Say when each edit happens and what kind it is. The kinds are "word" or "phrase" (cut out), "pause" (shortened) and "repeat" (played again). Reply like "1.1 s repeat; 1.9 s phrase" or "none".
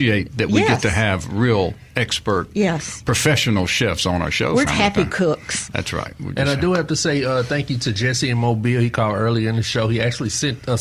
4.7 s word